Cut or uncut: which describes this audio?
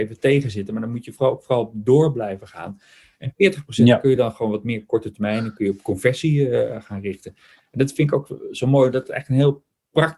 uncut